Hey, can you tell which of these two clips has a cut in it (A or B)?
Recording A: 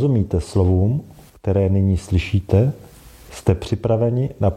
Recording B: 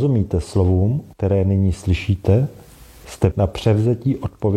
B